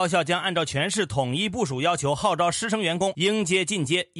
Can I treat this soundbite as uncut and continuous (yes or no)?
yes